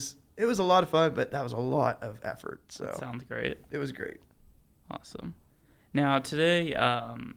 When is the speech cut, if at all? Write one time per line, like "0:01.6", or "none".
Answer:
none